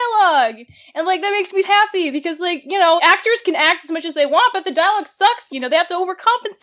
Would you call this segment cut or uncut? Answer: cut